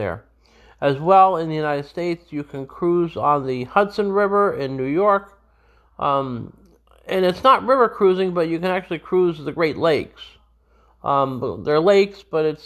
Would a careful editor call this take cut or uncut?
uncut